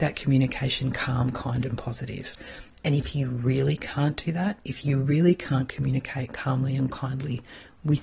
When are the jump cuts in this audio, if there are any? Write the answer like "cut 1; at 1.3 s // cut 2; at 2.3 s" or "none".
none